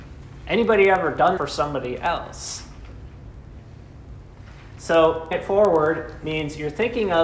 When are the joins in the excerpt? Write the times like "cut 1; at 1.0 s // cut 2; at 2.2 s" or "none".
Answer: cut 1; at 1.4 s // cut 2; at 5.3 s